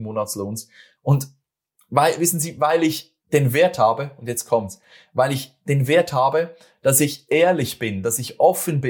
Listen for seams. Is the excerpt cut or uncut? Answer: cut